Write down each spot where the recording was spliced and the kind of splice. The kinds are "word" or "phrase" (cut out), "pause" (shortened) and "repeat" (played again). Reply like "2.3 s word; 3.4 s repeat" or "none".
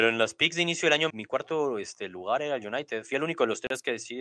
1.1 s word